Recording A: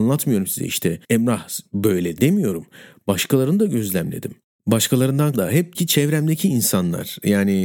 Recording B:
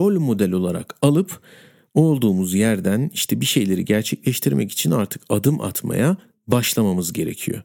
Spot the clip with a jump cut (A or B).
A